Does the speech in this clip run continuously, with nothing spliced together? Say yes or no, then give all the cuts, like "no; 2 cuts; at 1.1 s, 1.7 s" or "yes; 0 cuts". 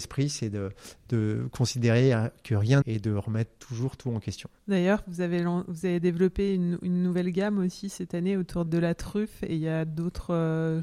no; 3 cuts; at 2.8 s, 4.6 s, 8.7 s